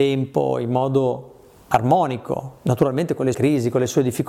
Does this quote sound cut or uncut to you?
cut